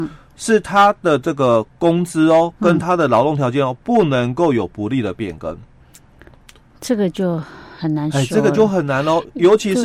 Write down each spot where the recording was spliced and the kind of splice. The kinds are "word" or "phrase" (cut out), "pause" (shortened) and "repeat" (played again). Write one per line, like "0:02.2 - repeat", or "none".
0:03.8 - pause